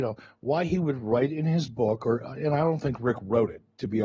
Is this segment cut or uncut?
uncut